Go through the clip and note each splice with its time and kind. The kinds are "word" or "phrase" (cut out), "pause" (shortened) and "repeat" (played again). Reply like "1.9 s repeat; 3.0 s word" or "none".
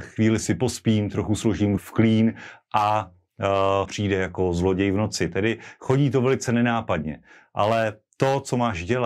1.8 s word; 3.9 s word